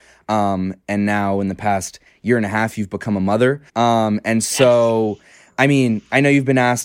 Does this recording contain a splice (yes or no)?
yes